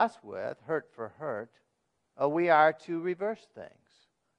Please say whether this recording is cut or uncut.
uncut